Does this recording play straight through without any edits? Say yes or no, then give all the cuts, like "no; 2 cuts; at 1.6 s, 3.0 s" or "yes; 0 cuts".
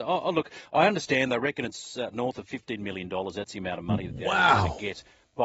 yes; 0 cuts